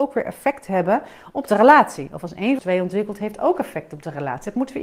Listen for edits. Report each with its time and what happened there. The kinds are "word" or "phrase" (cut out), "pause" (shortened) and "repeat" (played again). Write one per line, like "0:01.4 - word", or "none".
0:02.6 - word